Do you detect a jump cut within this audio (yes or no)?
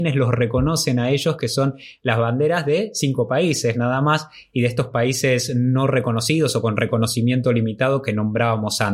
no